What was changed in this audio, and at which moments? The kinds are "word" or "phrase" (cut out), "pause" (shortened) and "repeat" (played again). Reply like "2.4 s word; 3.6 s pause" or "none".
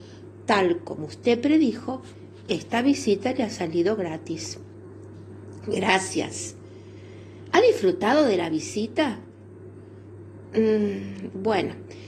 none